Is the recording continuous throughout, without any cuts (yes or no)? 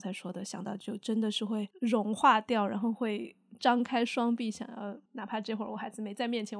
no